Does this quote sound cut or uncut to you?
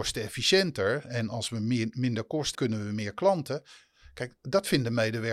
cut